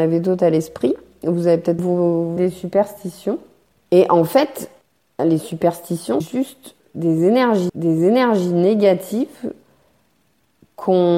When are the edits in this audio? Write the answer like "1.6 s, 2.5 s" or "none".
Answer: 1.8 s, 2.4 s, 3.7 s, 5.2 s, 6.2 s, 7.7 s